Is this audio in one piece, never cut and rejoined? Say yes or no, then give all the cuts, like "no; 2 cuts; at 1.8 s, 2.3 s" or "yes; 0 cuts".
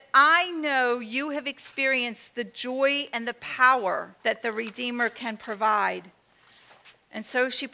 no; 1 cut; at 4.2 s